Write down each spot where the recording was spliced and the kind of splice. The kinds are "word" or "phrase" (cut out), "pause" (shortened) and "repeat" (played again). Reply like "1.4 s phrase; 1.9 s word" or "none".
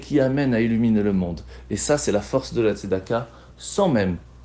none